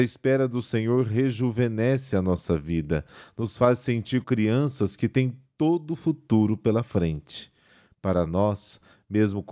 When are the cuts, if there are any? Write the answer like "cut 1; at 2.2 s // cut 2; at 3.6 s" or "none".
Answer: cut 1; at 4.2 s